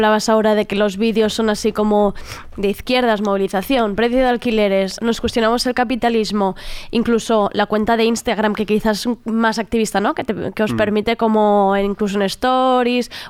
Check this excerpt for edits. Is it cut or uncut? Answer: cut